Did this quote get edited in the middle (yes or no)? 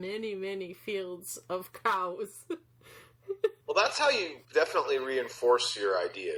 yes